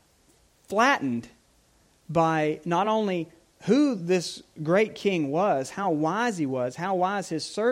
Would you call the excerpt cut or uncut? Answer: uncut